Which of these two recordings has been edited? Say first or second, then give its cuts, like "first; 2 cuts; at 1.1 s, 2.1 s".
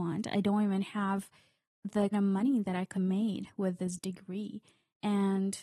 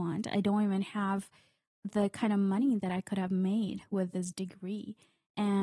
first; 2 cuts; at 2.1 s, 2.9 s